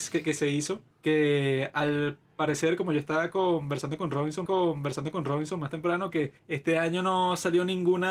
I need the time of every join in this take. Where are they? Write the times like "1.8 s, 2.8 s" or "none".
0.9 s, 4.5 s, 6.4 s